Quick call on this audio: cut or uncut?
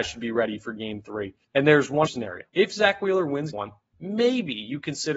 cut